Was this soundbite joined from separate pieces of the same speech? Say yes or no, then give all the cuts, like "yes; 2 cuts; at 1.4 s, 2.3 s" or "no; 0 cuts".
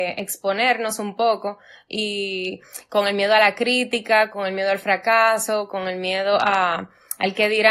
no; 0 cuts